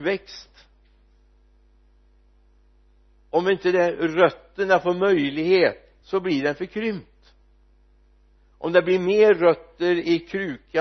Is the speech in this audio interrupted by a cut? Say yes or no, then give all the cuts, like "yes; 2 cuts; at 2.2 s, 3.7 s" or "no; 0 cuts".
no; 0 cuts